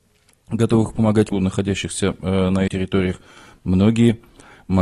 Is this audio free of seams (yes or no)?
no